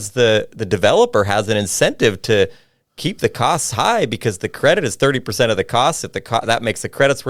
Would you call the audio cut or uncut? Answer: uncut